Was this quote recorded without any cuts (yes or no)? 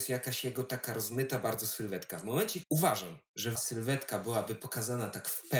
no